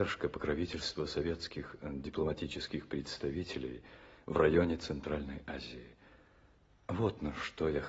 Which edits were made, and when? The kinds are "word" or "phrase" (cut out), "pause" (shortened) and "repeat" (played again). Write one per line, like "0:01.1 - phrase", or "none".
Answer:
none